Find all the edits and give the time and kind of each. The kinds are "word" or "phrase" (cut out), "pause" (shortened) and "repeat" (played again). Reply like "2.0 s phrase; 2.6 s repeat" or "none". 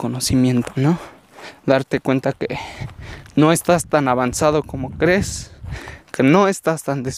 none

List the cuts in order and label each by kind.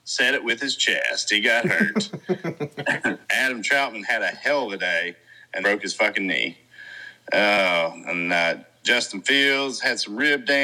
3.2 s pause; 5.6 s word

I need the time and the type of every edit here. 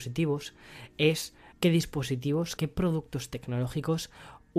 1.5 s word; 2.6 s word

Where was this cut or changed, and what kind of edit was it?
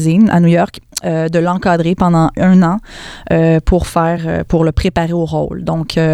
none

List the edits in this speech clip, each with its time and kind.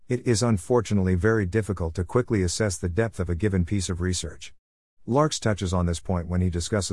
none

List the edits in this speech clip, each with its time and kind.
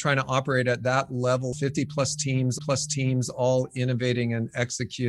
1.5 s phrase; 2.6 s repeat

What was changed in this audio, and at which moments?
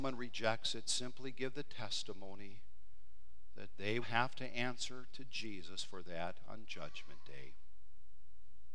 4.0 s word

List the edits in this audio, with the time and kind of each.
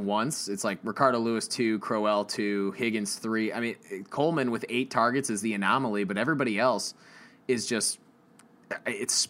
none

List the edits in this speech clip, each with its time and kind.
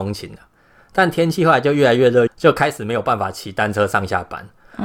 2.3 s phrase

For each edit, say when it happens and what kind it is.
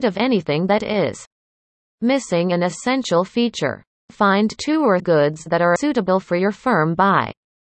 5.0 s word; 5.8 s word; 6.2 s word

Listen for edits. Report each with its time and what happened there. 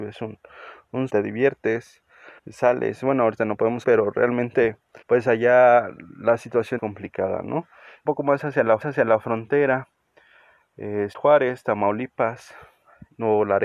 1.1 s phrase; 2.4 s pause; 3.8 s word; 5.0 s pause; 6.8 s phrase; 8.1 s phrase; 8.8 s repeat; 11.1 s word

